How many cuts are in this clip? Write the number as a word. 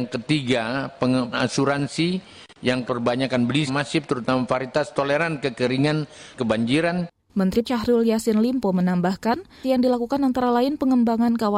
six